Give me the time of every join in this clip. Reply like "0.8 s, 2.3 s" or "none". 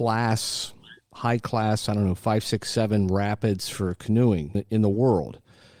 4.5 s